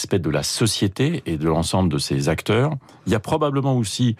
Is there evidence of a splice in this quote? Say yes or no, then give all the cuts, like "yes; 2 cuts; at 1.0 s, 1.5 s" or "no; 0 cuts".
no; 0 cuts